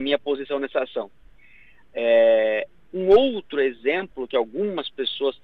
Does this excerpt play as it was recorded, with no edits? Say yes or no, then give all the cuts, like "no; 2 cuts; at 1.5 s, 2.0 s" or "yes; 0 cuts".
yes; 0 cuts